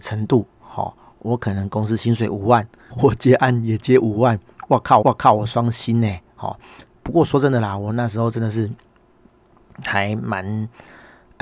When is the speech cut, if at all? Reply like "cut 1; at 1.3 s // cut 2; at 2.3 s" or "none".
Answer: cut 1; at 2.9 s // cut 2; at 5.0 s